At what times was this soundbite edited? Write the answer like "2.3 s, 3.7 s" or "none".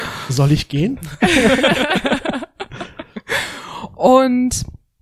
none